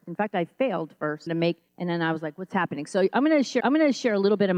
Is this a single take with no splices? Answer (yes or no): no